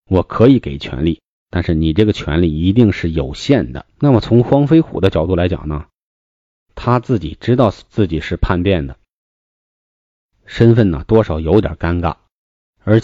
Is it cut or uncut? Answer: cut